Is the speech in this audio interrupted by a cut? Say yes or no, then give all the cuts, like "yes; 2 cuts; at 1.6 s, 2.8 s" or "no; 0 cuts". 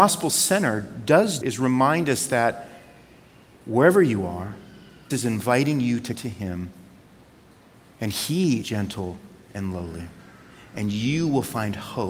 yes; 4 cuts; at 1.4 s, 5.1 s, 6.2 s, 8.6 s